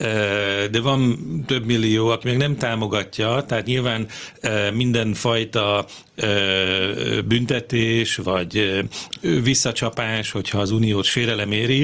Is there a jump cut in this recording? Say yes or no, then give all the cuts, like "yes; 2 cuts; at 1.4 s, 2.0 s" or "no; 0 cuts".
no; 0 cuts